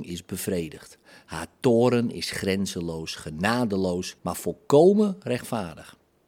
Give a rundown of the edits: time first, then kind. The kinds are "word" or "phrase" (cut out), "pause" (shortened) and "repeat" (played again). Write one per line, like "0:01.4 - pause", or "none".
0:04.2 - pause